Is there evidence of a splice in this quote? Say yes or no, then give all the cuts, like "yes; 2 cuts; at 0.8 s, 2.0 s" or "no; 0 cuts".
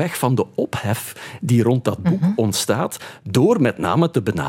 no; 0 cuts